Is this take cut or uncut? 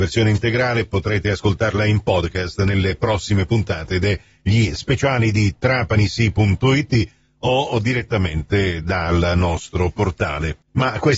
uncut